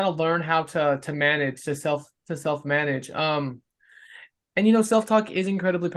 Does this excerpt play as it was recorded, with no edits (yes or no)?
yes